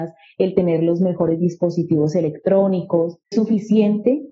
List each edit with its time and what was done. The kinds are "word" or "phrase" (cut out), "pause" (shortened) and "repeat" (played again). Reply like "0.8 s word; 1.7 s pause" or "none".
3.3 s word